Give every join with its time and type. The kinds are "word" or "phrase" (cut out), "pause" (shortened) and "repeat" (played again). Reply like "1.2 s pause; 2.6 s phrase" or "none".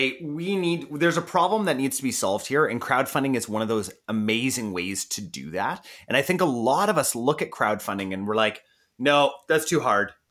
none